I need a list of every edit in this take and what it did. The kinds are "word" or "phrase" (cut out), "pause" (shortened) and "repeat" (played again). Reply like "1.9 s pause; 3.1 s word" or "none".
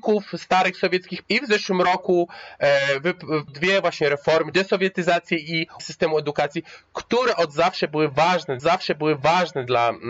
1.2 s word; 3.5 s word; 4.5 s word; 5.8 s word; 8.6 s repeat